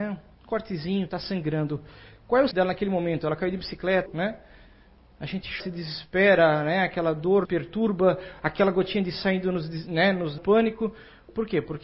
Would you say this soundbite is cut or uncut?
cut